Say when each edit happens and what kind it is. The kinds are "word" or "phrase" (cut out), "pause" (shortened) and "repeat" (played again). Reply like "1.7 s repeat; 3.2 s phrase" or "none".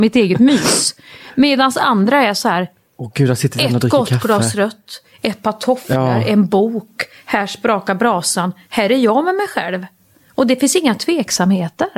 none